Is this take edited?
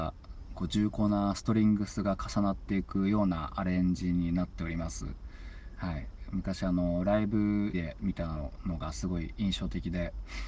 yes; 1 cut; at 7.7 s

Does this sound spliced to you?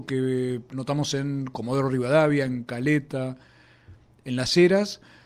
no; 0 cuts

